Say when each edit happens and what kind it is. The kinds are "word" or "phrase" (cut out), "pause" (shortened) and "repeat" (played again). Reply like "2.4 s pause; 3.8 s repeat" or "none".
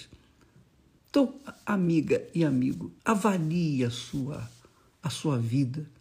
3.0 s pause